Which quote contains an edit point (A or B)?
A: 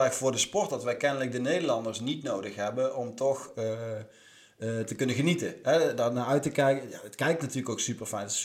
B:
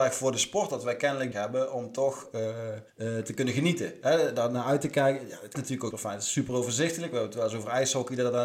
B